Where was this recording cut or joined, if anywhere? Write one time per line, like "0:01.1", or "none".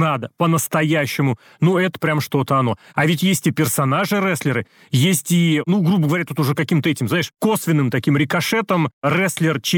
none